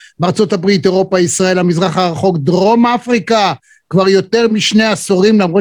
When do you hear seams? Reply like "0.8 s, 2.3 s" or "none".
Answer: none